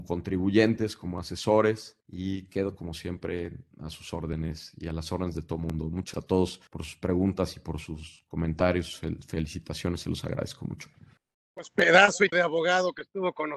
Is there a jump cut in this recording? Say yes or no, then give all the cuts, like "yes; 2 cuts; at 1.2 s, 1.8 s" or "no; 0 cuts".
yes; 6 cuts; at 2.0 s, 3.7 s, 6.1 s, 6.7 s, 11.2 s, 12.3 s